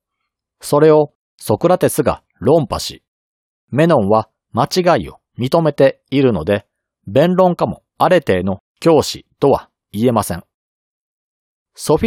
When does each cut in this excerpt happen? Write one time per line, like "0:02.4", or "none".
0:07.9